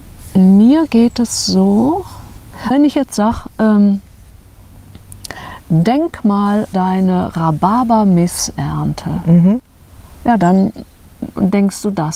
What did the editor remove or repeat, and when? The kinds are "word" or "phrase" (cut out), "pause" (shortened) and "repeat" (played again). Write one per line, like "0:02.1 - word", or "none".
0:02.7 - word
0:06.7 - word